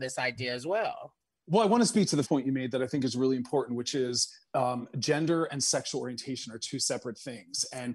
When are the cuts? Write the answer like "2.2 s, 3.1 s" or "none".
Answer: 2.3 s